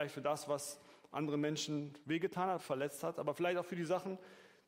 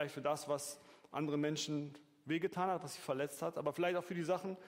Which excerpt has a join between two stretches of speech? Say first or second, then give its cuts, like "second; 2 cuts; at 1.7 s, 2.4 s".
first; 2 cuts; at 2.0 s, 2.6 s